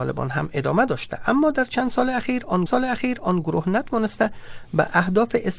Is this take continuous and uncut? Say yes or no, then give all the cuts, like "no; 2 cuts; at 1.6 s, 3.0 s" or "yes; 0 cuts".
no; 1 cut; at 2.7 s